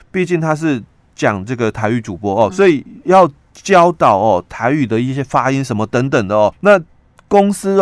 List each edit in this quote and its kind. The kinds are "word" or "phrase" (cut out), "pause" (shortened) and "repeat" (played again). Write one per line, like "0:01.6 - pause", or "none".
0:02.5 - word
0:06.5 - word